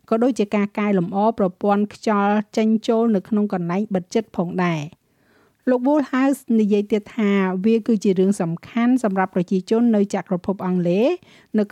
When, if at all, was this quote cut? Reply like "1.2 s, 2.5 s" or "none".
none